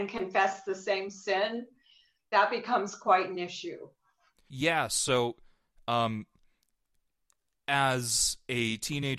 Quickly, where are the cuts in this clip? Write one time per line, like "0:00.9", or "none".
none